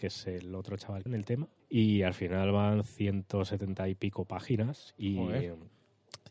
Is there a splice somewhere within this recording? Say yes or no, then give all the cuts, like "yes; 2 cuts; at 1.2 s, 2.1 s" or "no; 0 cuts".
yes; 2 cuts; at 1.1 s, 1.6 s